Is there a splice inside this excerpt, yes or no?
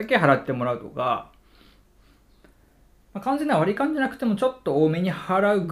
no